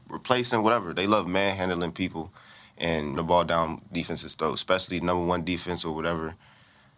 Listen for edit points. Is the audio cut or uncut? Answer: cut